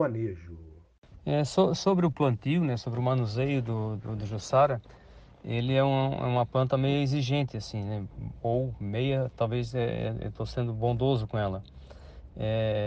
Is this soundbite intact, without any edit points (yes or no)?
yes